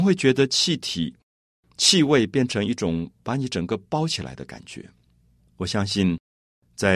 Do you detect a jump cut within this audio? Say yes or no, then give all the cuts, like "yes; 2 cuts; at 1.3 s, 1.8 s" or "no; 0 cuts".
no; 0 cuts